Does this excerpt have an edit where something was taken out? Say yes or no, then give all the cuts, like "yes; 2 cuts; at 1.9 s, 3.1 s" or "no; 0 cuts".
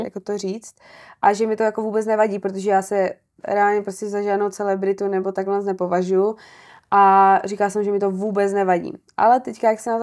no; 0 cuts